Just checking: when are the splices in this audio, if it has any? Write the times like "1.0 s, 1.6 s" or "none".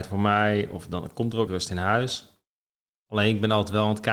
1.5 s